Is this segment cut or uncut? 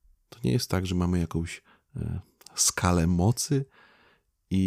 uncut